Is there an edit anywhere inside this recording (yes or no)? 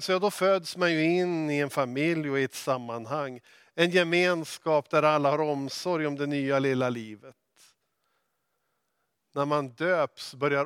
no